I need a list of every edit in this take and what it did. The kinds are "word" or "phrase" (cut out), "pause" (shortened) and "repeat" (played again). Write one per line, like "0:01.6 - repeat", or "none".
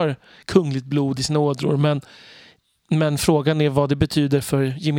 none